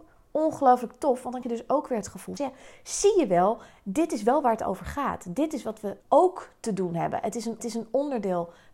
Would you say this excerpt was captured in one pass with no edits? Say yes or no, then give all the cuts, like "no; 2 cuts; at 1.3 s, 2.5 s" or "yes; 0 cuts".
no; 4 cuts; at 1.4 s, 2.4 s, 6.0 s, 7.6 s